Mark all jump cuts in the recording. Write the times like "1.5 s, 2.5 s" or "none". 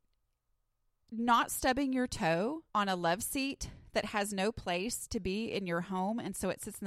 2.7 s